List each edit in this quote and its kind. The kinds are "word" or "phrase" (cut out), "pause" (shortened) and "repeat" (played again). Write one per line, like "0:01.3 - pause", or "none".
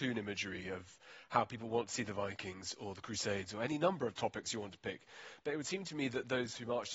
none